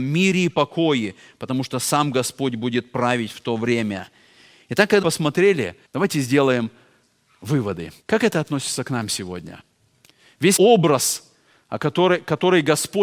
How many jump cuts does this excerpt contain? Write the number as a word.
four